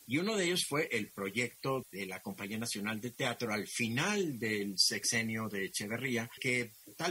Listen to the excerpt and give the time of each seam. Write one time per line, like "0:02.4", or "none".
0:01.8